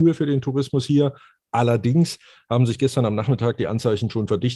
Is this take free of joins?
yes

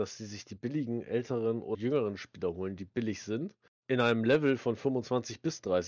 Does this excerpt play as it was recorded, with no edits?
no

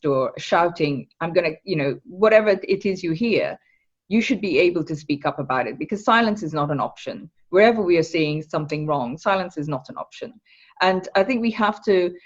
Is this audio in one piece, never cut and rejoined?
yes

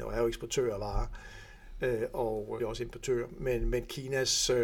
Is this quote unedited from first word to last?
no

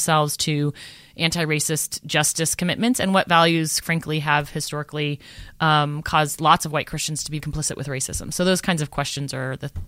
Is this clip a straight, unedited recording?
no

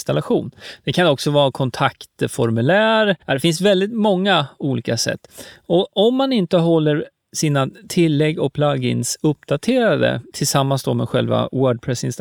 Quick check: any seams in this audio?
yes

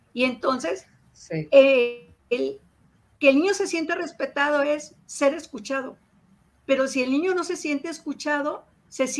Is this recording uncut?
yes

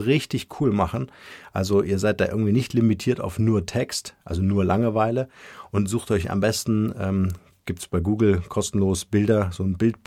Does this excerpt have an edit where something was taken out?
no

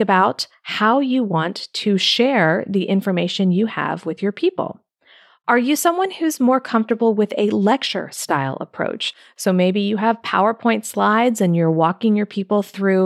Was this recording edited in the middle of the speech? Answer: no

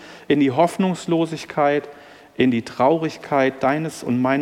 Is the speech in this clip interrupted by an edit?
no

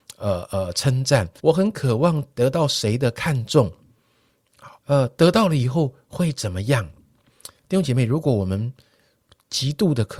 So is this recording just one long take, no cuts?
no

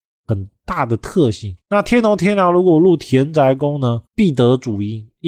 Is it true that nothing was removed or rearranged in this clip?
no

